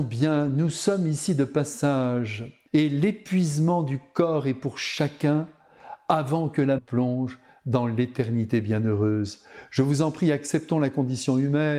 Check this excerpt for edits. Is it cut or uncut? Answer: cut